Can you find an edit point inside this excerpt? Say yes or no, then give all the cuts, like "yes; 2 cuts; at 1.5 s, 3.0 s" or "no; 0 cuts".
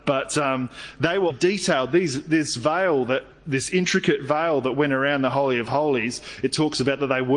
yes; 1 cut; at 1.3 s